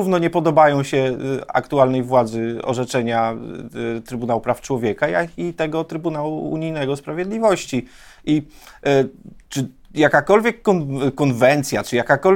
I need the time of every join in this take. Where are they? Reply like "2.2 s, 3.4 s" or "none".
none